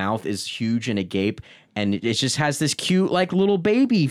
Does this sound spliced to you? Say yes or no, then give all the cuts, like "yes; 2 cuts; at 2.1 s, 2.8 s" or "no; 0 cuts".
no; 0 cuts